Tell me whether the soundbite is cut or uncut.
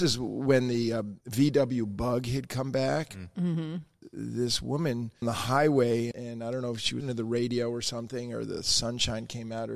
cut